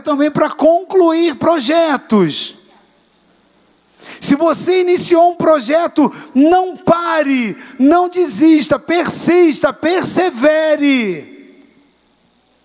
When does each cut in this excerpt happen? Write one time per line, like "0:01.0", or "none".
none